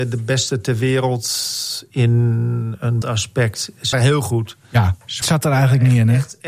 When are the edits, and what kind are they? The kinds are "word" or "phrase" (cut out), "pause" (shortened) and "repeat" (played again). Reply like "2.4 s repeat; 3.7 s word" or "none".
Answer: 3.0 s word; 3.9 s word; 5.2 s word